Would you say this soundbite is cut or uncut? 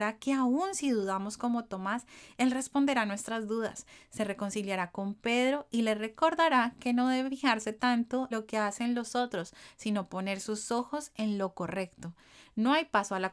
cut